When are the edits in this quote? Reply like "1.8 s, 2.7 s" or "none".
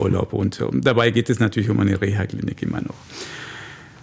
none